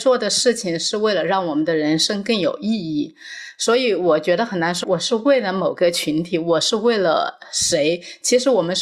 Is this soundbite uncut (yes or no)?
no